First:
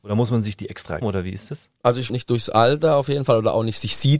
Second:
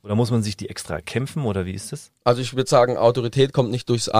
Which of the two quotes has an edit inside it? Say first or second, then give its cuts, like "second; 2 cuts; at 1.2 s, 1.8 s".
first; 2 cuts; at 1.0 s, 2.1 s